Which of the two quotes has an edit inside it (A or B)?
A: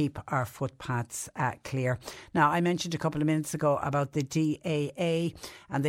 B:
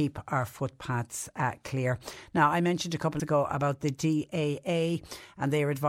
B